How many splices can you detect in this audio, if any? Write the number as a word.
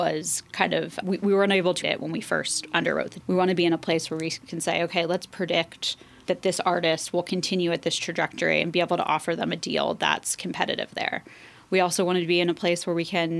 four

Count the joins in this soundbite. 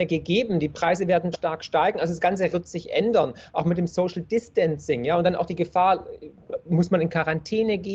two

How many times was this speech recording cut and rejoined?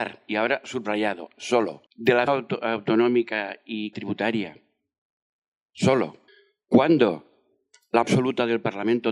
five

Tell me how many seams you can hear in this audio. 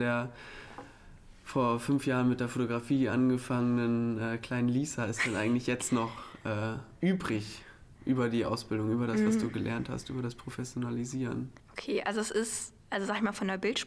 three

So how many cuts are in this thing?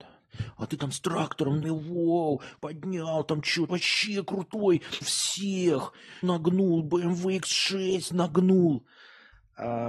five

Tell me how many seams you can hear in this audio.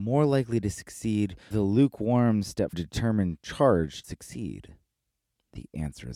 three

